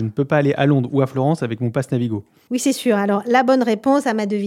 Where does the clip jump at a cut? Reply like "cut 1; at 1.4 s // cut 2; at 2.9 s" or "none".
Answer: none